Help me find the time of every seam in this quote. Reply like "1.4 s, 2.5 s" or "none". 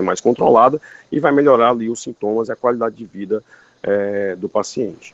none